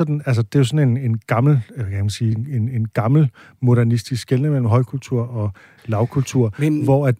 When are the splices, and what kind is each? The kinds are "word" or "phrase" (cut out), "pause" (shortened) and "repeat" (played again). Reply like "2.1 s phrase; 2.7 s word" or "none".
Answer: none